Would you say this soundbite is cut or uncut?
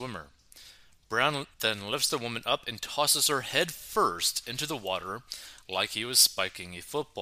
cut